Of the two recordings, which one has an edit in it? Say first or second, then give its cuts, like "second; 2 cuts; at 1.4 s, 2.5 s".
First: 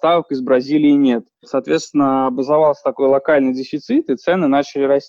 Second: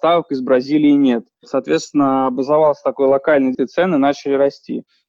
second; 1 cut; at 3.5 s